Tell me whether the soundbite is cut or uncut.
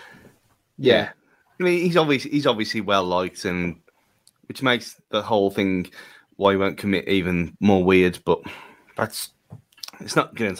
uncut